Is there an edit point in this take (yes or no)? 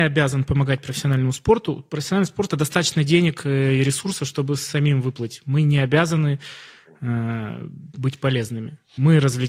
no